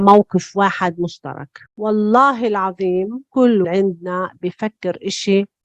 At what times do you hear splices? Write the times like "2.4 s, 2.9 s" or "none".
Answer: 1.7 s, 3.6 s